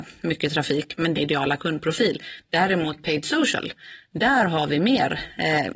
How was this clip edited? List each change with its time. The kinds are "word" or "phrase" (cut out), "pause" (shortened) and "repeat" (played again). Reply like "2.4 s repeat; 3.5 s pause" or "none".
1.1 s phrase